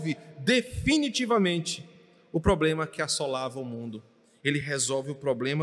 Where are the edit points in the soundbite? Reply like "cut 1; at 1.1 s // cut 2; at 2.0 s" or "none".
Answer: none